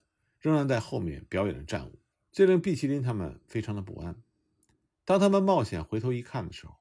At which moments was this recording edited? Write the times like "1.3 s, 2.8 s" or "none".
2.1 s